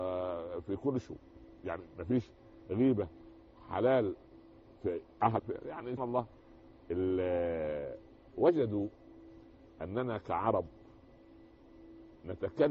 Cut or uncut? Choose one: cut